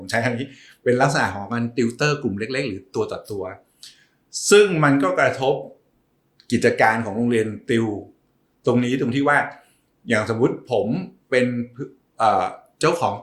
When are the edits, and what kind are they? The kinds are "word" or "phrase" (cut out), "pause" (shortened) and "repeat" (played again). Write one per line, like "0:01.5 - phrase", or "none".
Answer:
none